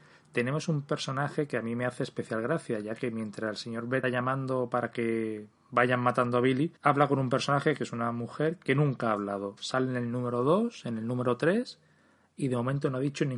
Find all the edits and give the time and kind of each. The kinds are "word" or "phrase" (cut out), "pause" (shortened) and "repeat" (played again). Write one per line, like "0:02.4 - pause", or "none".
0:04.0 - word
0:06.8 - pause